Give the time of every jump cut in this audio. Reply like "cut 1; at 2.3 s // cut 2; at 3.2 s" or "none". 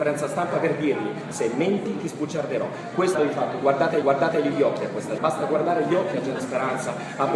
cut 1; at 3.1 s // cut 2; at 4.0 s // cut 3; at 5.2 s // cut 4; at 6.4 s